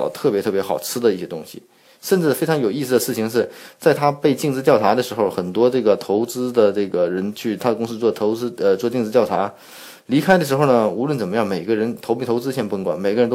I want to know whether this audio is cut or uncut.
uncut